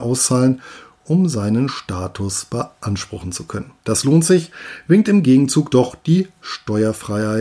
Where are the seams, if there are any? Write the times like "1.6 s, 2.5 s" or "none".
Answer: 3.8 s